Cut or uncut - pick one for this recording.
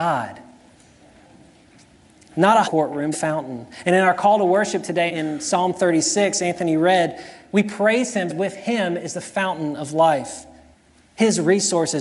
cut